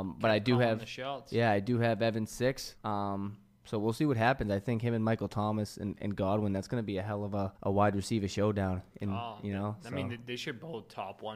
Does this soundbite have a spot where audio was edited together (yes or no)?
yes